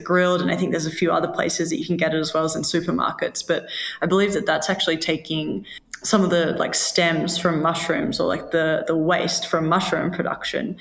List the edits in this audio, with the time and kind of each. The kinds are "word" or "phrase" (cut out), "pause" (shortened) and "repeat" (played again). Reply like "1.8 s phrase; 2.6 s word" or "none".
none